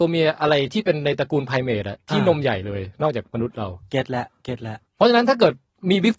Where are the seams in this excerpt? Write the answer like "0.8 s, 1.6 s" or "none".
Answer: 4.9 s